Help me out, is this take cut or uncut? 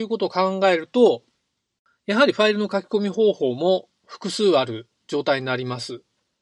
uncut